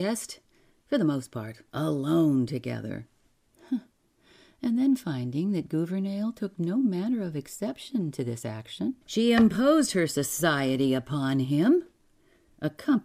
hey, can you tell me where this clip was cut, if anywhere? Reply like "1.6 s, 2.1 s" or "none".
1.7 s, 3.3 s, 9.0 s